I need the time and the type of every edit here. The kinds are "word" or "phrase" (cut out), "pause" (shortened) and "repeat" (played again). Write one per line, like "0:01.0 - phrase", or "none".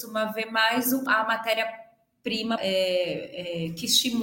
0:01.1 - phrase
0:02.6 - word